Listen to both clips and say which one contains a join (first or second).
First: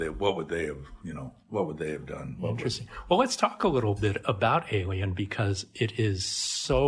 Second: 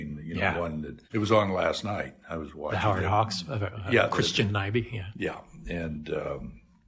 second